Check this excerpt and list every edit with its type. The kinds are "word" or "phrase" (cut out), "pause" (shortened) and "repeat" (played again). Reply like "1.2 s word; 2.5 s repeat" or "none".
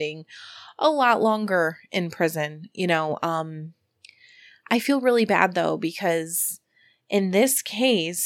none